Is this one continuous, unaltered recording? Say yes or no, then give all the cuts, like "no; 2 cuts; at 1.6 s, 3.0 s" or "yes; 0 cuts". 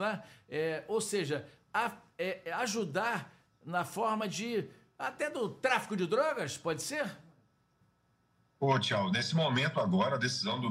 yes; 0 cuts